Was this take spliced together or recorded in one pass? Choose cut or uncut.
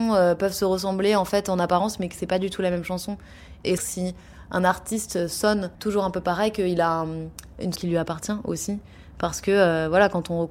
cut